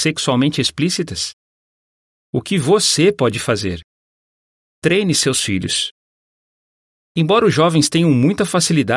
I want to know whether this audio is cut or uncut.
uncut